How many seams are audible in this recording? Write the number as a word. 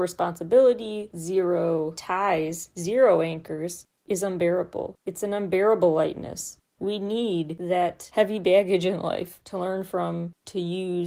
two